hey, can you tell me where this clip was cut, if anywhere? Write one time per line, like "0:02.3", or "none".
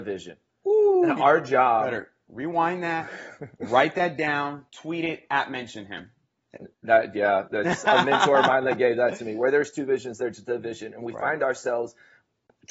0:04.7
0:06.7